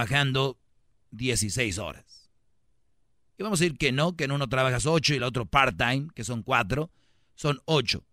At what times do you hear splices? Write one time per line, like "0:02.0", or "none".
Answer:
none